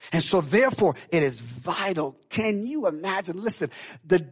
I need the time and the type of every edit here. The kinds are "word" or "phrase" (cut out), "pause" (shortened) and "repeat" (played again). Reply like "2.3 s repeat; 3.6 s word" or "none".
none